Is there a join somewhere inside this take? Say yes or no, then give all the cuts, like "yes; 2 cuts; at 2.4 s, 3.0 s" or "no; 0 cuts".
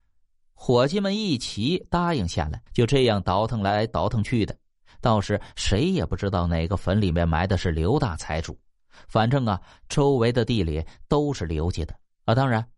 yes; 1 cut; at 2.7 s